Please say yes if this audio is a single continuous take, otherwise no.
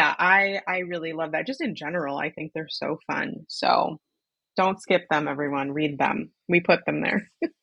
yes